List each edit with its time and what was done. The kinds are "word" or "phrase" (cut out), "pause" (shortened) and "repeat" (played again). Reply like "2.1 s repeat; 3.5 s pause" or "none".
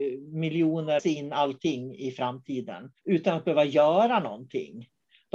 1.0 s phrase; 3.0 s pause

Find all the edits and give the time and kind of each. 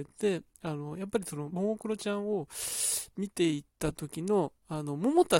1.5 s phrase; 3.7 s pause

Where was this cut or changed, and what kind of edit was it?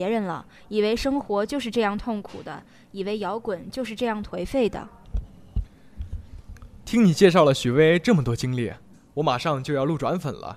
none

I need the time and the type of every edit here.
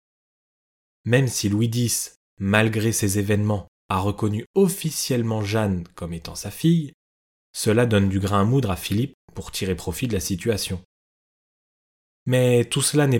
none

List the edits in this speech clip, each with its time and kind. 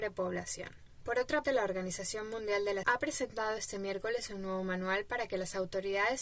1.4 s word; 2.8 s word

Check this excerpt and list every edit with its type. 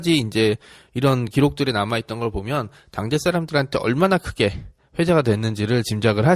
none

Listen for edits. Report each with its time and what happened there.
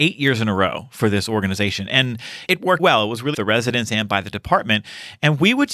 2.5 s word; 2.8 s word; 3.3 s phrase

